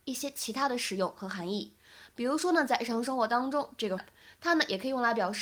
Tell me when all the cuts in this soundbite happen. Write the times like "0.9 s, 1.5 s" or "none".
4.0 s